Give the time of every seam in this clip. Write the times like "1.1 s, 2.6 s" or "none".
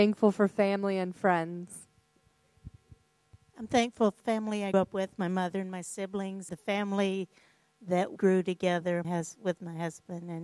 4.2 s, 4.7 s, 6.5 s, 8.2 s, 9.0 s